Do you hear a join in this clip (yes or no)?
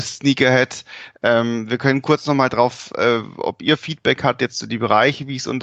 no